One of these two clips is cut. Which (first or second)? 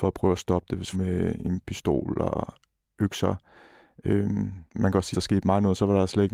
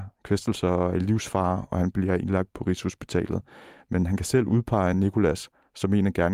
first